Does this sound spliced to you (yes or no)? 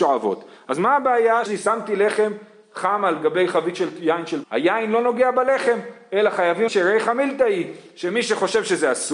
yes